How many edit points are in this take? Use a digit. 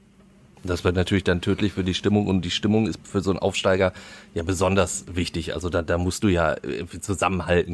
0